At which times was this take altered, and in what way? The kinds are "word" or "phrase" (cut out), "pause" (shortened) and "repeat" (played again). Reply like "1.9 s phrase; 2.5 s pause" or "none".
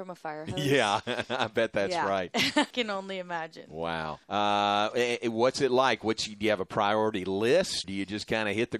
2.7 s word; 4.2 s pause; 7.8 s word